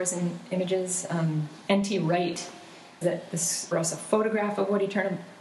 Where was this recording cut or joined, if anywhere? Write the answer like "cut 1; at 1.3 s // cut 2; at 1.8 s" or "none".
cut 1; at 3.0 s // cut 2; at 3.7 s

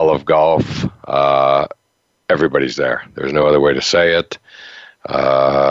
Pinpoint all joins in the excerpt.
none

